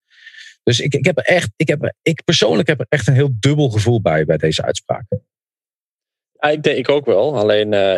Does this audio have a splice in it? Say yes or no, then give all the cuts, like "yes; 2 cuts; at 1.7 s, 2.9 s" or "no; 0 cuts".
no; 0 cuts